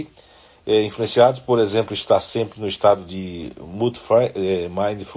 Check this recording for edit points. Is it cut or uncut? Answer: uncut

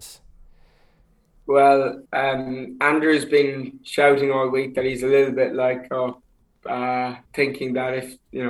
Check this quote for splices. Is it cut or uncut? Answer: cut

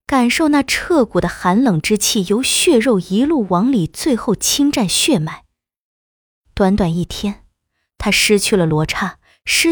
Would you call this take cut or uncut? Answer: uncut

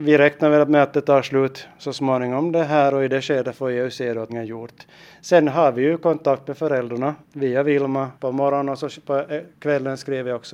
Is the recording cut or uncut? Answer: cut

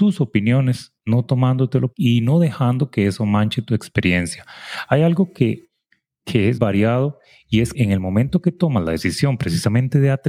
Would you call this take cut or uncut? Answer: cut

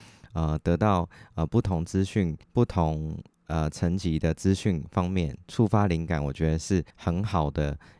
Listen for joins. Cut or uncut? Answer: cut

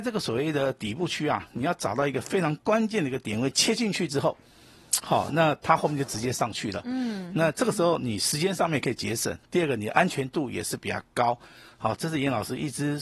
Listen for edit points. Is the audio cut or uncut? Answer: uncut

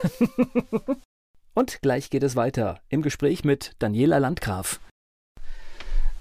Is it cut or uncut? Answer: uncut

